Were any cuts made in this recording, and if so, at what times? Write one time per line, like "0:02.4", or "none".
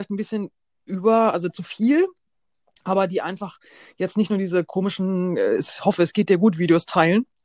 none